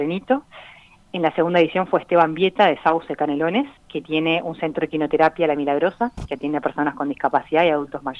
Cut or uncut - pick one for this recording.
cut